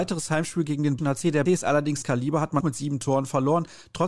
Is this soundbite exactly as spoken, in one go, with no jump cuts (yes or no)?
no